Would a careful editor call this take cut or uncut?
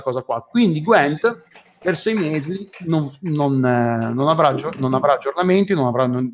uncut